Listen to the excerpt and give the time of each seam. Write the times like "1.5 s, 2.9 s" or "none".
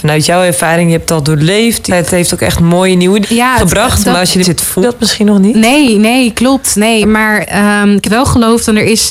1.9 s, 3.2 s, 4.4 s, 4.8 s, 7.0 s, 8.0 s